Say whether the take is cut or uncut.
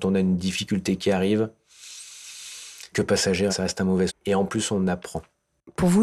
cut